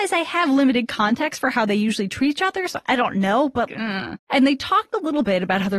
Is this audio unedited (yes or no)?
no